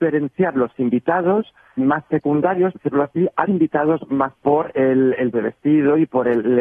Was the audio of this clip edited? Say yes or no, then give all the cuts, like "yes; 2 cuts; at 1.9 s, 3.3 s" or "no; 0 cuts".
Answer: yes; 5 cuts; at 1.8 s, 2.8 s, 3.4 s, 4.3 s, 5.3 s